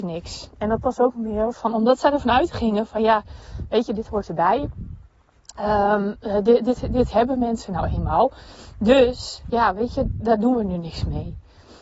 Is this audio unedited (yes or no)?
yes